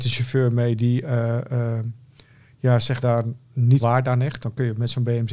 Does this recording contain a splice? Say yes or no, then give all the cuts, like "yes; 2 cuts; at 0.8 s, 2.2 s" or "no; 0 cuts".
yes; 2 cuts; at 3.0 s, 3.8 s